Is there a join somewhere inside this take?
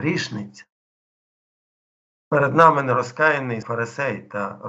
yes; 1 cut; at 3.6 s

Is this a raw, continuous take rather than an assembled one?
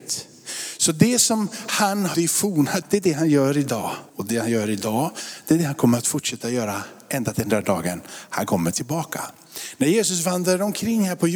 no; 3 cuts; at 2.1 s, 2.8 s, 4.1 s

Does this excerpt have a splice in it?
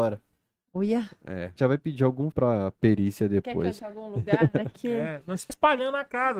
yes; 4 cuts; at 1.6 s, 2.3 s, 3.8 s, 5.5 s

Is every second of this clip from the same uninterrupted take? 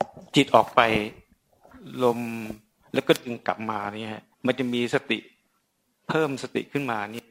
no; 1 cut; at 4.3 s

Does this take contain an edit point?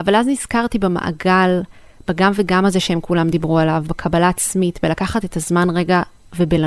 no; 0 cuts

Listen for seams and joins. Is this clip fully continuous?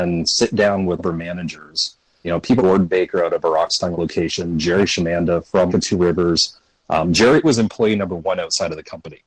no; 6 cuts; at 1.0 s, 2.2 s, 2.6 s, 3.9 s, 5.7 s, 7.4 s

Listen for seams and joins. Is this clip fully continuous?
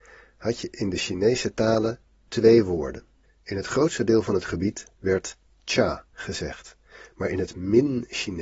no; 1 cut; at 6.1 s

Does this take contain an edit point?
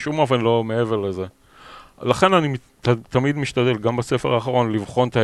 no; 0 cuts

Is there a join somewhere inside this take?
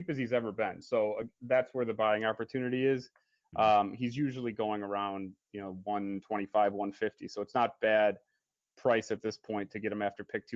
yes; 1 cut; at 5.4 s

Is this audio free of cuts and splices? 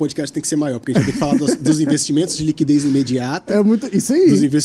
yes; 0 cuts

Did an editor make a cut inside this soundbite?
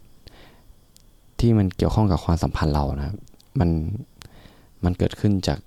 no; 0 cuts

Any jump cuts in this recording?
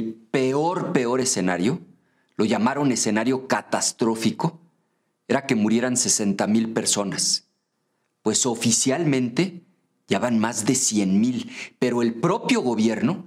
no; 0 cuts

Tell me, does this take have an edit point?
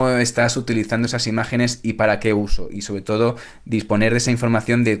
no; 0 cuts

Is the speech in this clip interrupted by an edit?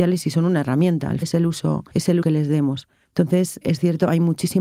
yes; 4 cuts; at 1.2 s, 1.9 s, 2.2 s, 3.6 s

